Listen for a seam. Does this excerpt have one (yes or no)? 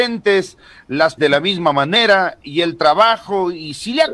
yes